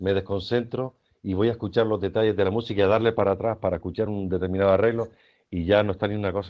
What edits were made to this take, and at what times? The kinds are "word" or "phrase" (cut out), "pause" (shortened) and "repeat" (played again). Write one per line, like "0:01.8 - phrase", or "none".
none